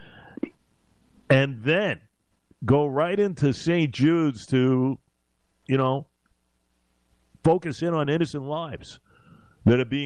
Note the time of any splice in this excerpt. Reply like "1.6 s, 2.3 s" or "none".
none